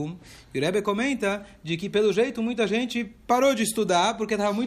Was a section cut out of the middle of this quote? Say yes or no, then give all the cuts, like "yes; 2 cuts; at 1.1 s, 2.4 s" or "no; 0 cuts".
no; 0 cuts